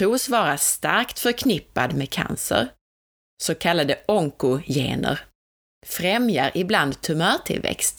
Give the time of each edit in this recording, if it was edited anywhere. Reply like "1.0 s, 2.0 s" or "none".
none